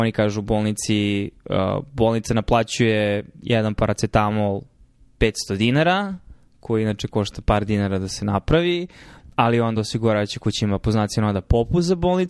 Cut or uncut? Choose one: uncut